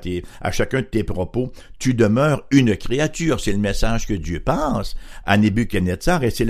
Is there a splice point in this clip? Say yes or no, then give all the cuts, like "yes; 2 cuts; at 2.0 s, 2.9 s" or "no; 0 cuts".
no; 0 cuts